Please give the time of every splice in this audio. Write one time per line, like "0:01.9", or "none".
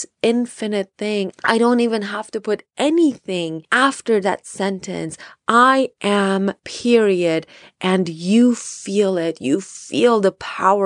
0:06.6